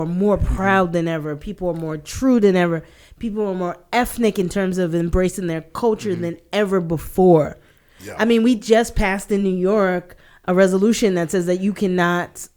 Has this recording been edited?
no; 0 cuts

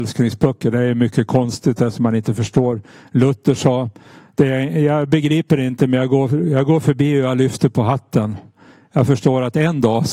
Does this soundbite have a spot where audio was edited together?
no; 0 cuts

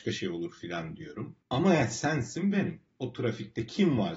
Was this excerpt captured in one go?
no; 1 cut; at 1.4 s

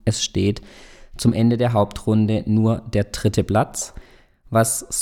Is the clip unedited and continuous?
yes; 0 cuts

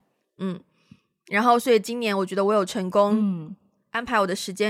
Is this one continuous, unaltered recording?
yes; 0 cuts

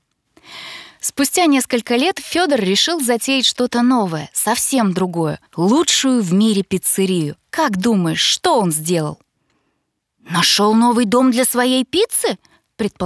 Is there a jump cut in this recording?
yes; 2 cuts; at 5.5 s, 7.4 s

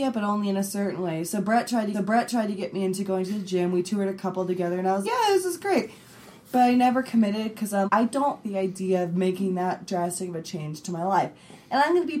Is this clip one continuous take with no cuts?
no; 4 cuts; at 1.9 s, 5.0 s, 7.9 s, 8.4 s

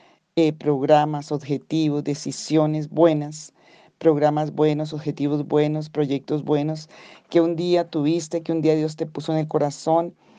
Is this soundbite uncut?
yes; 0 cuts

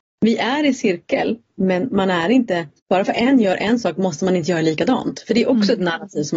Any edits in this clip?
yes; 1 cut; at 2.8 s

